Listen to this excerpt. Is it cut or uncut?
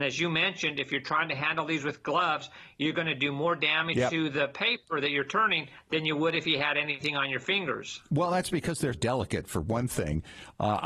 cut